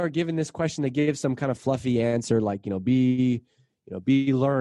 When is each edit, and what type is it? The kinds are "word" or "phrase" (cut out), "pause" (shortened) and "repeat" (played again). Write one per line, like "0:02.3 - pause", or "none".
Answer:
none